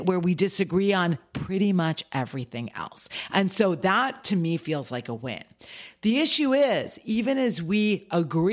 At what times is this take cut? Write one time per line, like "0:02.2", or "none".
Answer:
none